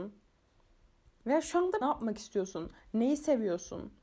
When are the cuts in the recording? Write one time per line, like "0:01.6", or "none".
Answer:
0:01.8